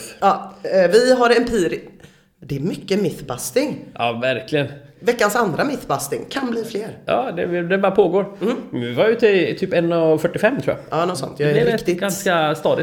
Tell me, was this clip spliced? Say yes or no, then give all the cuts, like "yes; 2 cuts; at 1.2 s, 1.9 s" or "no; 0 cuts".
no; 0 cuts